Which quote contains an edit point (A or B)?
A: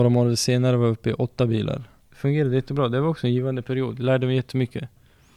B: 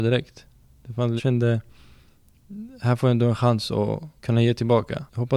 B